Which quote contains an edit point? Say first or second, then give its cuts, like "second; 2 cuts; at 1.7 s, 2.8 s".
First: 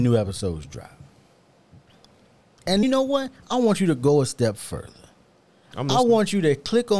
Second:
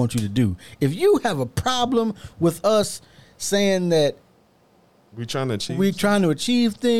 first; 1 cut; at 2.8 s